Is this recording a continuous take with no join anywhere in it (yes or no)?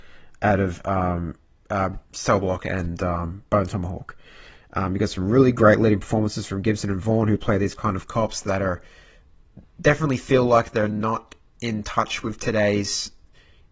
no